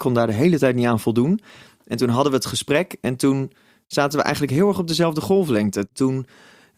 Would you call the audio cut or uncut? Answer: uncut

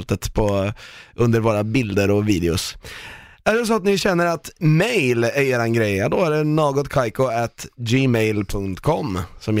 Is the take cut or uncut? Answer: uncut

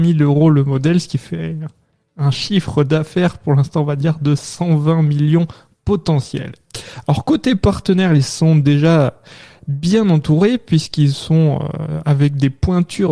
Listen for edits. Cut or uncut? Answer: uncut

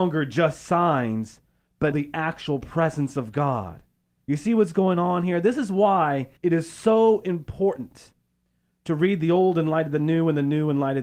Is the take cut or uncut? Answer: cut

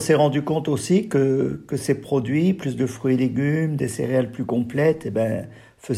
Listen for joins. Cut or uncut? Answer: uncut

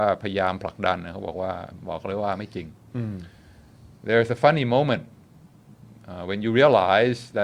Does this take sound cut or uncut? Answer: uncut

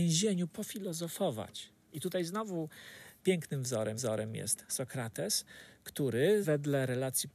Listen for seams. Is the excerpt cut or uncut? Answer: cut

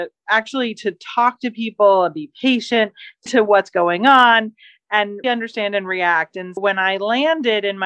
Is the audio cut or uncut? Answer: cut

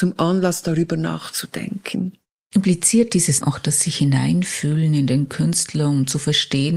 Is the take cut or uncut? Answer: cut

